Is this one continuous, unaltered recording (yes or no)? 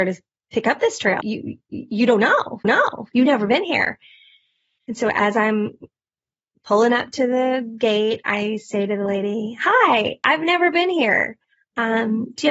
no